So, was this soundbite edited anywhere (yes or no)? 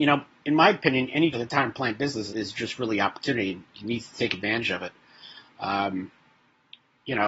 yes